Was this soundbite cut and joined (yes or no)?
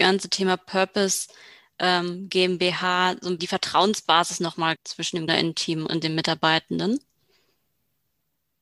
yes